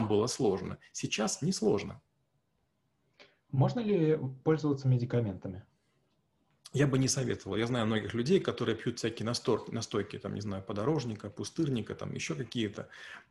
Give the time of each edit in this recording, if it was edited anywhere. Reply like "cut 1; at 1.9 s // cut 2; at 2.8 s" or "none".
none